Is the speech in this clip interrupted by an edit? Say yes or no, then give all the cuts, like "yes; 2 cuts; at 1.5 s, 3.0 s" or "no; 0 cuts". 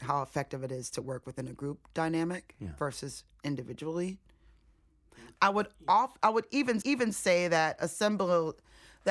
yes; 1 cut; at 6.8 s